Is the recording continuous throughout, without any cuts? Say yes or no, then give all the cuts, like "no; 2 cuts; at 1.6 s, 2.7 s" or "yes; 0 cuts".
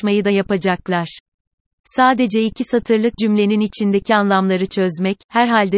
no; 1 cut; at 3.2 s